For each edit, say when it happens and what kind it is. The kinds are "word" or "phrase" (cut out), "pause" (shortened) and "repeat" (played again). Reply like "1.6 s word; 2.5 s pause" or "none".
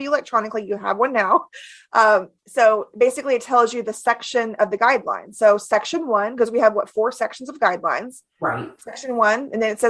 2.4 s pause